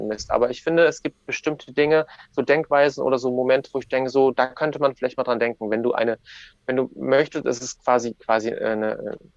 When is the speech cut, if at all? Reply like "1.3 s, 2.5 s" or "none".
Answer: none